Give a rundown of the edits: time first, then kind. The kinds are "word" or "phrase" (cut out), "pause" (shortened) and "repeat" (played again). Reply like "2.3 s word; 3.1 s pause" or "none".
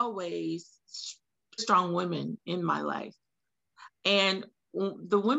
1.6 s word